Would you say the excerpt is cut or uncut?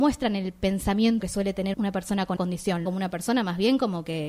cut